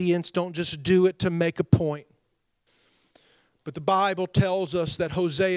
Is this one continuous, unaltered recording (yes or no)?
yes